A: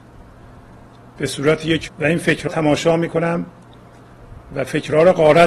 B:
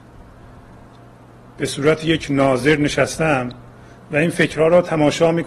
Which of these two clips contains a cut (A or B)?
A